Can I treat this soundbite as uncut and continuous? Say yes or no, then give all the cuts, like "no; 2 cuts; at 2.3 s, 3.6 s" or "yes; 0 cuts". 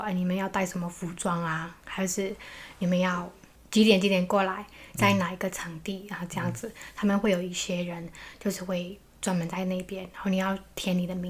no; 1 cut; at 1.8 s